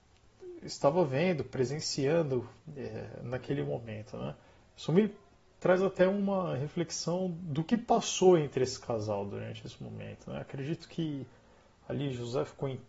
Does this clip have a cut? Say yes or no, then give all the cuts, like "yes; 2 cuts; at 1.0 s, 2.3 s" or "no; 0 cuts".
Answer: no; 0 cuts